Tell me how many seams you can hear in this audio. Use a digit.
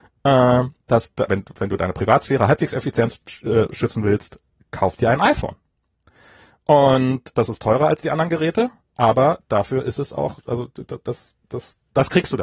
2